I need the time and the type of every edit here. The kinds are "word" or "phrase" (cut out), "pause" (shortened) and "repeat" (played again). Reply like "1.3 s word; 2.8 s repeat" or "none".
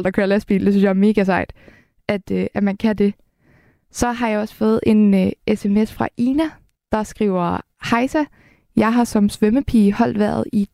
none